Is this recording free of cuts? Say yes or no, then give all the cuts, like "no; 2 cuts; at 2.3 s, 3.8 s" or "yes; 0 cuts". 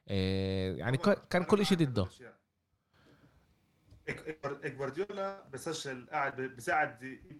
yes; 0 cuts